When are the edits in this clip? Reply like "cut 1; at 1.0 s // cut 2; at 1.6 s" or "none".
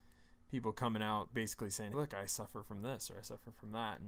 cut 1; at 1.3 s // cut 2; at 1.9 s